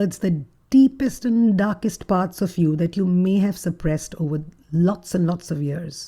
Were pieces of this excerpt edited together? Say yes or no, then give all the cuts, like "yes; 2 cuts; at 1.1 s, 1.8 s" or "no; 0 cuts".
no; 0 cuts